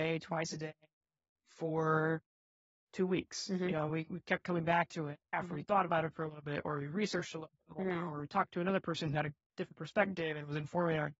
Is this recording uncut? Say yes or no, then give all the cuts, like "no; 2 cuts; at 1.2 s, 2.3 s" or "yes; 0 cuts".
yes; 0 cuts